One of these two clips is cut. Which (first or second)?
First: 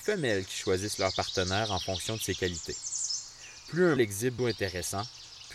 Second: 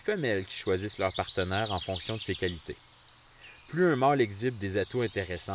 first